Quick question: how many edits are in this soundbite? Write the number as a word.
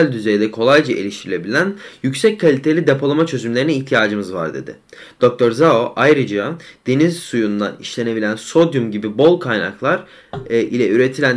zero